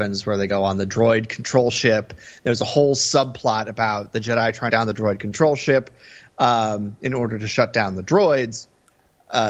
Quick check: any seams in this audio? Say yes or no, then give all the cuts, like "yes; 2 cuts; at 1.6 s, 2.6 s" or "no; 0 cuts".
yes; 1 cut; at 4.7 s